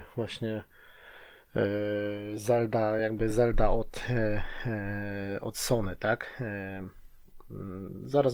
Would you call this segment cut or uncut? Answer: uncut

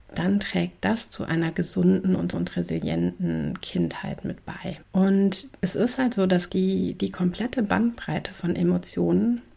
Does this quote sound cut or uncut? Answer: cut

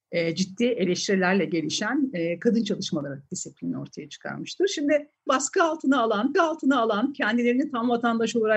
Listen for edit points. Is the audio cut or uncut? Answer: cut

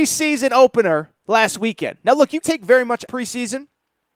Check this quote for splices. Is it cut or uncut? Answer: cut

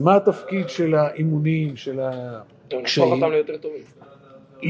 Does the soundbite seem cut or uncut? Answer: cut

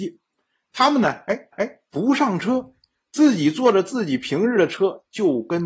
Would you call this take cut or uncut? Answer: cut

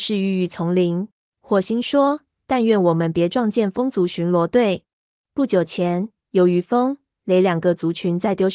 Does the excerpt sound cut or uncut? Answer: cut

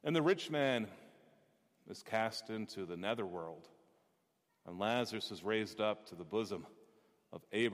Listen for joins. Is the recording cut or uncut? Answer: uncut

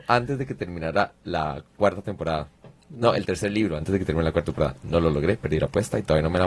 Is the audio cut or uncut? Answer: uncut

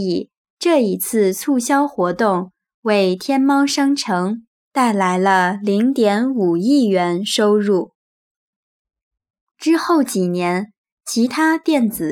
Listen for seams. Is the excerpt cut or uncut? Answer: uncut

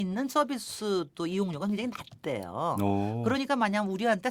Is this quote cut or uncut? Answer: uncut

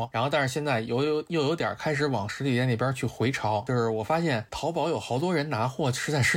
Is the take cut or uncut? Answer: uncut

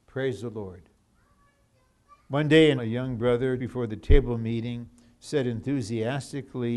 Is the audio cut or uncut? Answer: cut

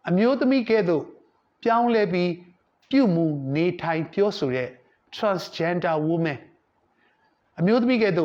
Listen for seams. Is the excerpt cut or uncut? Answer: uncut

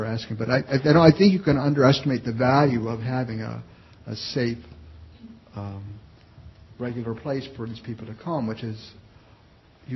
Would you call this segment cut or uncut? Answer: uncut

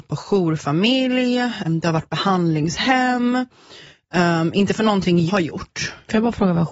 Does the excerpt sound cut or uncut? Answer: cut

